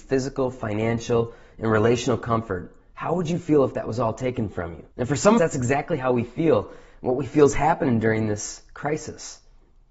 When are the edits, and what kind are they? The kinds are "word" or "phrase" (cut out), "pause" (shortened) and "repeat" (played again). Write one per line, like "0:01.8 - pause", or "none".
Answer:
0:04.9 - pause
0:05.4 - phrase